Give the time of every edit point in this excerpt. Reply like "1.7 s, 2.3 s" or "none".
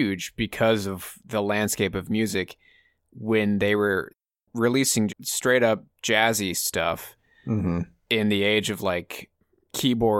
5.1 s